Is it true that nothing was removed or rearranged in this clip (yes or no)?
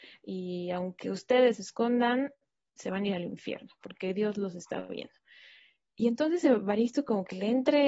yes